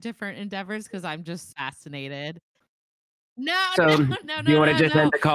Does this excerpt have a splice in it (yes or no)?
yes